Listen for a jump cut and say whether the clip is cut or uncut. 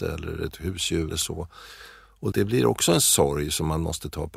cut